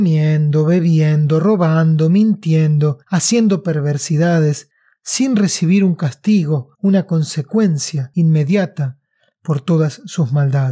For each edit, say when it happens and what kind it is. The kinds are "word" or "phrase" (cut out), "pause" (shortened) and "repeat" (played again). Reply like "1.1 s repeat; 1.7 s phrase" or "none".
3.0 s pause; 6.7 s pause